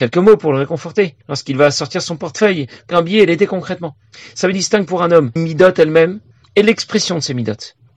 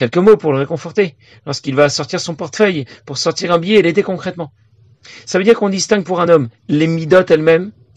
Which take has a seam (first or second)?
first